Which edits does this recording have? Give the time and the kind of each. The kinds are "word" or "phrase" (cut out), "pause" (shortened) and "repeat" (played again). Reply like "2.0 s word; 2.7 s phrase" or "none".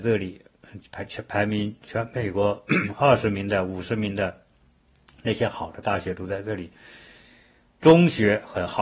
none